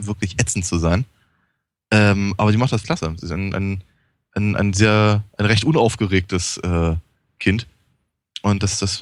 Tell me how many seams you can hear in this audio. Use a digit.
1